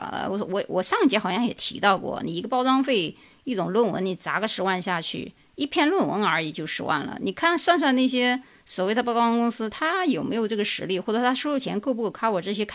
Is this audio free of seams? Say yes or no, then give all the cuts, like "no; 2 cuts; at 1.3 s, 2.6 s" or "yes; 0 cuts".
yes; 0 cuts